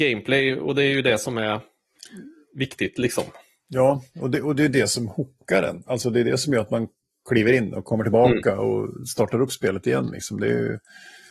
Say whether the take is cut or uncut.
uncut